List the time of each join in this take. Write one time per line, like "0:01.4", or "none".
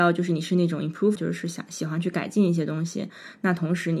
0:01.2